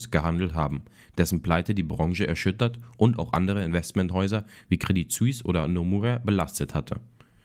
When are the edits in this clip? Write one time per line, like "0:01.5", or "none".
none

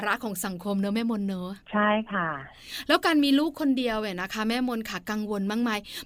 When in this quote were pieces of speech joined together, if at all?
0:01.6

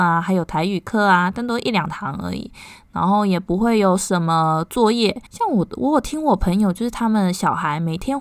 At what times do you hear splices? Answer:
0:05.3

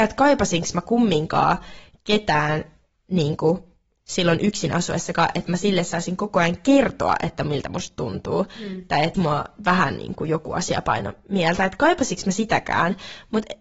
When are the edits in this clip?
0:09.1

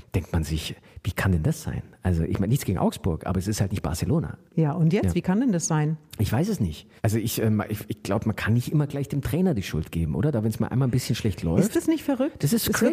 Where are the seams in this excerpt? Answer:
0:04.5
0:07.0

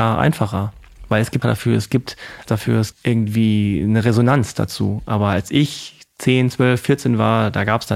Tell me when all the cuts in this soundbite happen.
0:01.4
0:02.4
0:02.9

